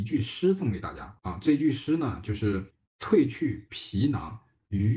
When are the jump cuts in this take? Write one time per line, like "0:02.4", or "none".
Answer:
0:01.2
0:02.7